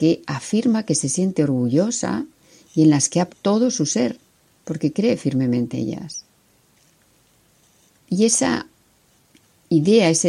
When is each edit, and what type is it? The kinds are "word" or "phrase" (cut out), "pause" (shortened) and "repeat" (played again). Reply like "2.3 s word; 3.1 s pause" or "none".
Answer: 3.3 s word; 5.7 s word